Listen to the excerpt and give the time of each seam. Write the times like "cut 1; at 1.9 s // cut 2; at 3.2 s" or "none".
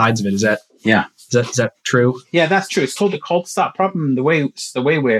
cut 1; at 1.8 s